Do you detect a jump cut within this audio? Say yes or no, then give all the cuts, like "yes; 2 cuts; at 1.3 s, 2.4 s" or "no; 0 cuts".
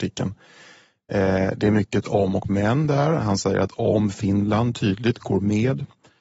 no; 0 cuts